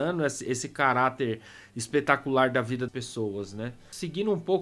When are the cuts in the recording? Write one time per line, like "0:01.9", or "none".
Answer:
0:02.9